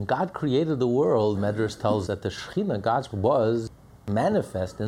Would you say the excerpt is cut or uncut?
cut